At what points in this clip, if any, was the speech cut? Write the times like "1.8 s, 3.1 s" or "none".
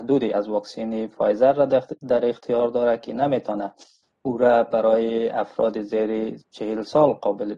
none